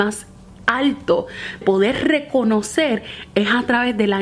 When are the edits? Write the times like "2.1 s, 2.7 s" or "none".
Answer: 1.6 s